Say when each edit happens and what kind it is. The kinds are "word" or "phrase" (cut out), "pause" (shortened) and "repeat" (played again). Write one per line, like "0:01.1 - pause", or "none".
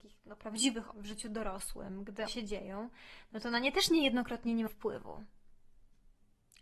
0:00.9 - word
0:02.3 - word
0:04.7 - word